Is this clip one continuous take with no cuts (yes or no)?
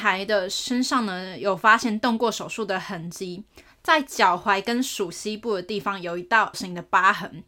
no